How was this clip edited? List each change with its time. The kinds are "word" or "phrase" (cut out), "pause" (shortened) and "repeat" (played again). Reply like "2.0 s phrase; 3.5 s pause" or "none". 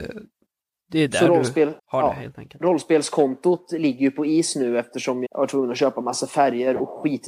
1.8 s pause; 5.3 s word